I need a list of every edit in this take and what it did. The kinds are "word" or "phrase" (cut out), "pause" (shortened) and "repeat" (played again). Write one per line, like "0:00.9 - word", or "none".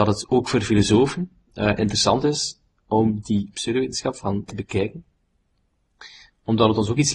0:04.5 - word